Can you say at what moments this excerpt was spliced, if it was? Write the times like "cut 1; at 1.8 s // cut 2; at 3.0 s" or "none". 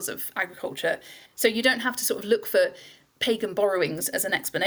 cut 1; at 1.3 s